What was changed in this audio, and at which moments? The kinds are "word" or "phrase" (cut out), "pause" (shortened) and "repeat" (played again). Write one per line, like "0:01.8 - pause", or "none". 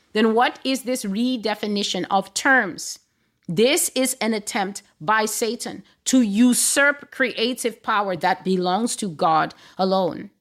none